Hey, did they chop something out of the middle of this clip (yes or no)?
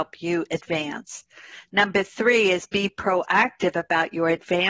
no